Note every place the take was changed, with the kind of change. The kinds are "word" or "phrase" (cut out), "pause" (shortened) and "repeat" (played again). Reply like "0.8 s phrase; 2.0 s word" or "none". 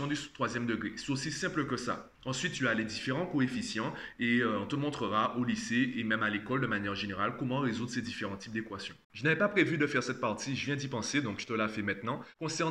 2.2 s pause; 9.0 s pause